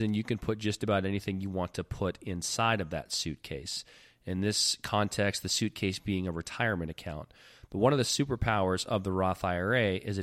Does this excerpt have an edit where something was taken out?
no; 0 cuts

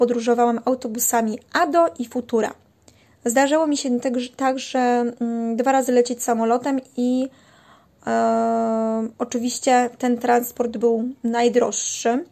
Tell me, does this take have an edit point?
no; 0 cuts

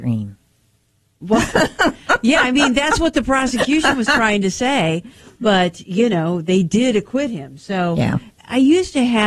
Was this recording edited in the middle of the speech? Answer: no; 0 cuts

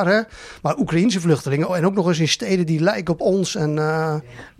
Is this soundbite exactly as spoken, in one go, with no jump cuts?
no; 1 cut; at 1.7 s

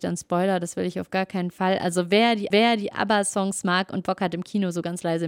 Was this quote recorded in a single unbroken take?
no; 1 cut; at 2.5 s

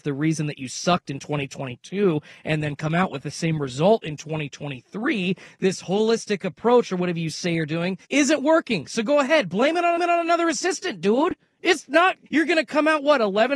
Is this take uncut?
no; 3 cuts; at 8.0 s, 10.0 s, 12.3 s

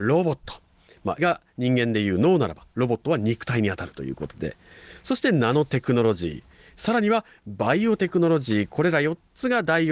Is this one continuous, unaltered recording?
no; 1 cut; at 1.2 s

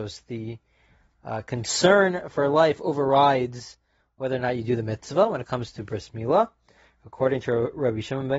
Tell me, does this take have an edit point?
no; 0 cuts

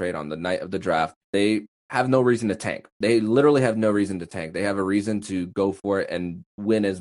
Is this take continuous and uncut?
no; 1 cut; at 1.2 s

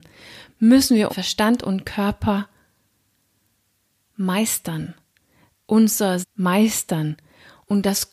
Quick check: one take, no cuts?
no; 2 cuts; at 1.1 s, 6.2 s

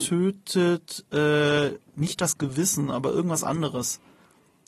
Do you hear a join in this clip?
no; 0 cuts

